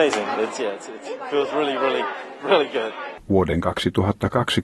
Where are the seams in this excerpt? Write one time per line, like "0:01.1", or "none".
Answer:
none